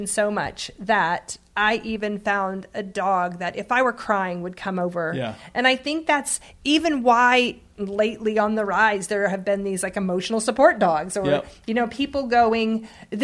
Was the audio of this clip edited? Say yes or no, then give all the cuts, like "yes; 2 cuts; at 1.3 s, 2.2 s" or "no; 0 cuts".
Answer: no; 0 cuts